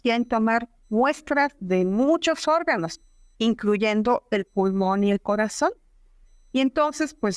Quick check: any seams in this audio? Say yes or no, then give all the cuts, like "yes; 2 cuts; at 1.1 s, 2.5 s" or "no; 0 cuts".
no; 0 cuts